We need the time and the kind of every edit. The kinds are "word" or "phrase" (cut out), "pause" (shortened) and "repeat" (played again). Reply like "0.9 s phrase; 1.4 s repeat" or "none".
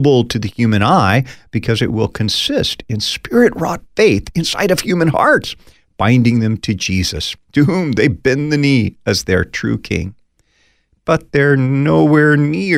none

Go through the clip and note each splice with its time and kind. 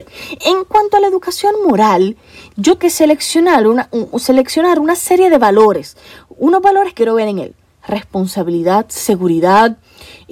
2.8 s word; 4.1 s word; 7.0 s word

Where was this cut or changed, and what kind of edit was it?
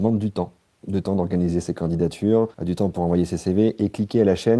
2.5 s pause

